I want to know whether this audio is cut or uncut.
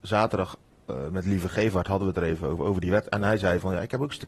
uncut